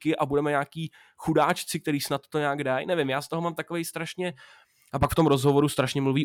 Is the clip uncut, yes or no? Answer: yes